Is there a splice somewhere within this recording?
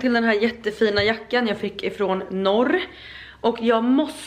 no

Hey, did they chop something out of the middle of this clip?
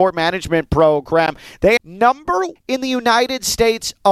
yes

